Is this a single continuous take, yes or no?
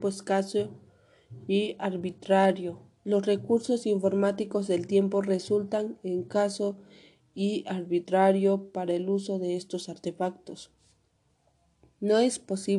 yes